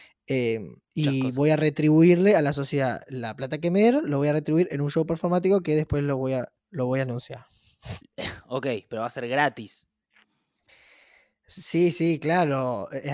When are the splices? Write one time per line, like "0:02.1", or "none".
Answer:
0:06.6